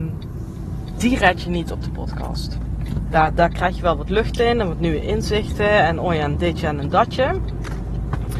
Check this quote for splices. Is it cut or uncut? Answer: uncut